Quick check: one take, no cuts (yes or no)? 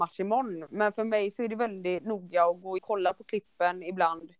no